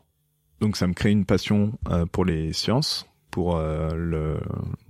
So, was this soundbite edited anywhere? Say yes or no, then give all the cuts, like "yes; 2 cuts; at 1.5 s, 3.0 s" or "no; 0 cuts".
no; 0 cuts